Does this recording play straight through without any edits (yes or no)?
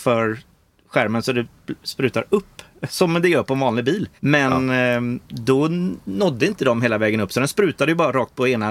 no